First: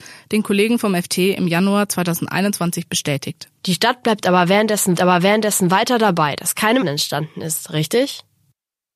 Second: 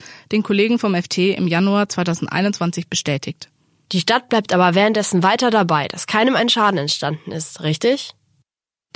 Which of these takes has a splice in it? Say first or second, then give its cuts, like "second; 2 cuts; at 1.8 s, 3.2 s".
first; 3 cuts; at 3.6 s, 4.9 s, 6.8 s